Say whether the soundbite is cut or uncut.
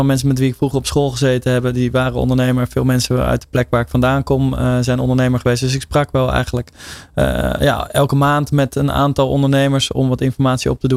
uncut